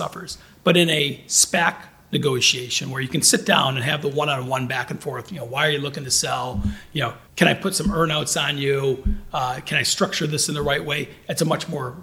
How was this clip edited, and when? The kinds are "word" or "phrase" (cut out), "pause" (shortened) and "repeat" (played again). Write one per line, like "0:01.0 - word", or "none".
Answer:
0:07.3 - pause